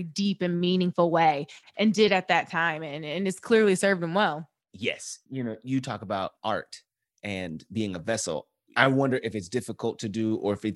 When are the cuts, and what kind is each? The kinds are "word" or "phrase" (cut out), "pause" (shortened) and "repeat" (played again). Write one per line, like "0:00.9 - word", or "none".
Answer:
none